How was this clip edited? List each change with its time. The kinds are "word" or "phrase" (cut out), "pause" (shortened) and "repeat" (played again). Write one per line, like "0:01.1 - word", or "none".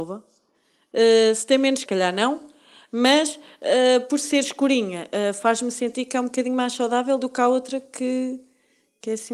0:01.9 - phrase